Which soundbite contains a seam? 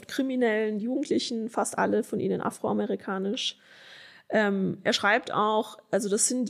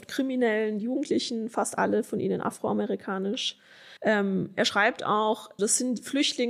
second; 2 cuts; at 4.0 s, 5.6 s

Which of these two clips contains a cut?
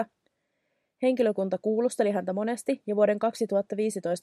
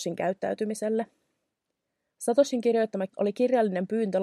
second; 1 cut; at 3.1 s

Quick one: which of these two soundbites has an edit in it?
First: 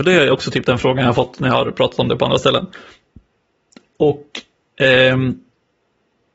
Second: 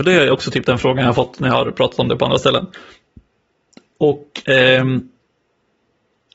second; 1 cut; at 4.4 s

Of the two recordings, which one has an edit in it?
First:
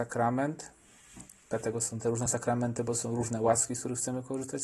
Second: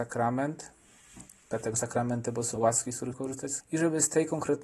second; 4 cuts; at 1.7 s, 2.6 s, 3.1 s, 3.6 s

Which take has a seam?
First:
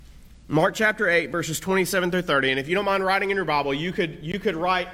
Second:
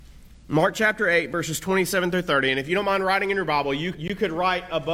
second; 1 cut; at 3.9 s

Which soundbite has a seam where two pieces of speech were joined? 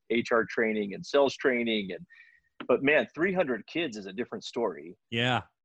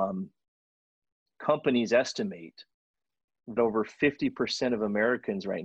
second; 1 cut; at 3.6 s

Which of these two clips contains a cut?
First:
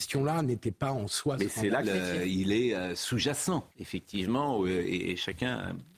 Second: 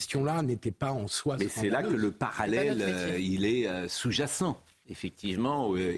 first; 2 cuts; at 1.8 s, 3.7 s

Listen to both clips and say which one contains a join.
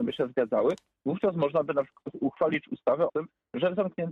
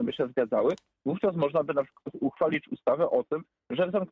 first; 1 cut; at 3.1 s

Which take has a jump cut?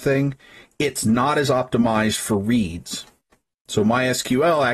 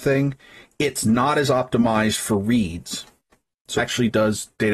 second; 1 cut; at 3.8 s

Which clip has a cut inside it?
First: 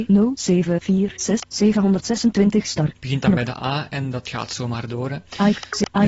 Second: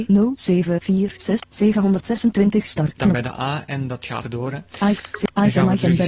second; 2 cuts; at 3.0 s, 4.2 s

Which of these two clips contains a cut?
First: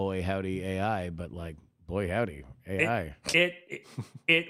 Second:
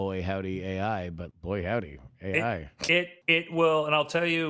second; 2 cuts; at 1.3 s, 3.2 s

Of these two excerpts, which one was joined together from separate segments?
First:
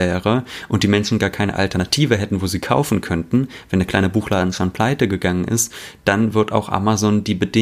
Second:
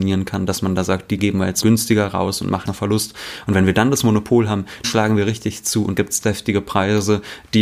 second; 5 cuts; at 1.2 s, 1.6 s, 2.7 s, 4.8 s, 5.9 s

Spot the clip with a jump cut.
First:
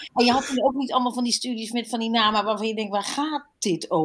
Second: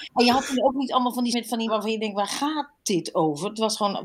second; 2 cuts; at 1.3 s, 1.7 s

